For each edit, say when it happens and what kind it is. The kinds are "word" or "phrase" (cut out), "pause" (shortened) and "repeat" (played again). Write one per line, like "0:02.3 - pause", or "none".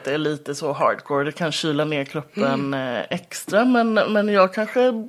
none